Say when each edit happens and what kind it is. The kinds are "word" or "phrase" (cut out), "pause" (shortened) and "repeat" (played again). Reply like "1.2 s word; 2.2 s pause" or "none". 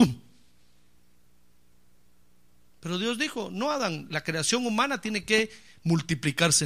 4.1 s word